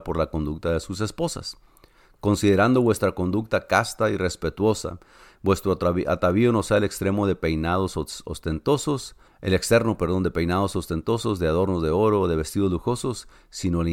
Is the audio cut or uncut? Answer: cut